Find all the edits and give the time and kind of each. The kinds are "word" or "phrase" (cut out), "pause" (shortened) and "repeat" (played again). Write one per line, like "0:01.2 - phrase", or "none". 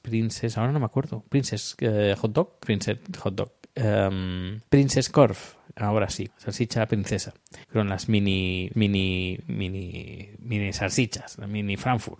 0:02.6 - phrase
0:04.7 - pause
0:06.3 - phrase
0:07.6 - pause
0:08.7 - repeat